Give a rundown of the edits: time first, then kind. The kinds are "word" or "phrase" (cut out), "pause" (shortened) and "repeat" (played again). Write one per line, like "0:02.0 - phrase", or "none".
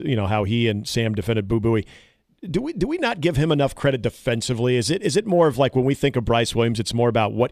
none